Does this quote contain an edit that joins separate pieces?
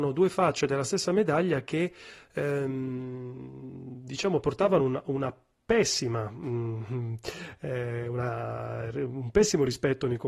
no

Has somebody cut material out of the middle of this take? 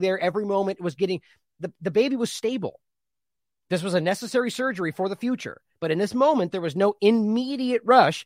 no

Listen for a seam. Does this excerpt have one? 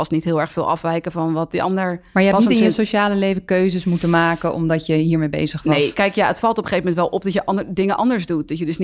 no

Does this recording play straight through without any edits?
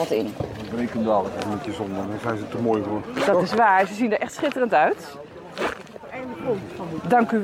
yes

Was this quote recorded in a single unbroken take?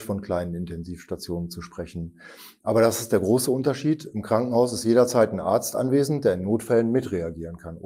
yes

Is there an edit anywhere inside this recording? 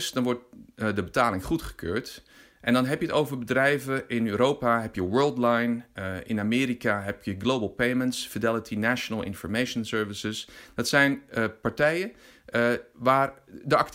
no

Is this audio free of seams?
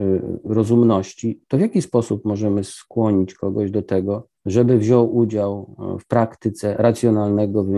no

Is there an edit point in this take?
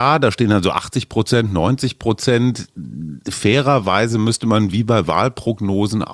no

